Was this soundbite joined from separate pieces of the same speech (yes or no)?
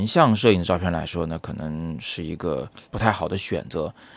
yes